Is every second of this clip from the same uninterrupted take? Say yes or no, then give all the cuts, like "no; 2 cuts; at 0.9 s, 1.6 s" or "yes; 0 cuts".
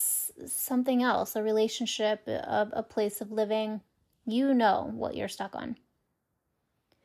yes; 0 cuts